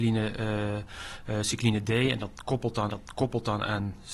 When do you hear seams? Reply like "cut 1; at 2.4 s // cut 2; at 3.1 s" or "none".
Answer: cut 1; at 2.9 s